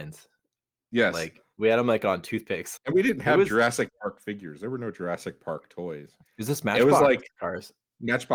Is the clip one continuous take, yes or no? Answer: yes